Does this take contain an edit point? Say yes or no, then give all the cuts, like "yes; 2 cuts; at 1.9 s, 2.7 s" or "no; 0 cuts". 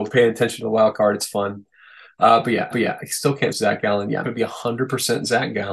yes; 3 cuts; at 2.7 s, 3.5 s, 4.2 s